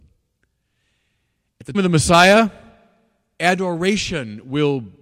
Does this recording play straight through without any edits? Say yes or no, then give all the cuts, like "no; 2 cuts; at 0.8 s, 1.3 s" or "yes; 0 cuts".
no; 1 cut; at 1.7 s